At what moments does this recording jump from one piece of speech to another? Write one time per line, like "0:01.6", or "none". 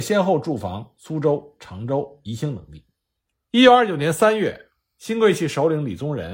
0:03.3